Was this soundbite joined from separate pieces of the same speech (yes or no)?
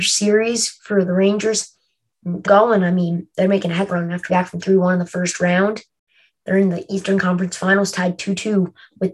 yes